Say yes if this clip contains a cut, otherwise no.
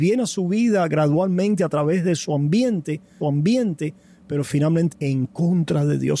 yes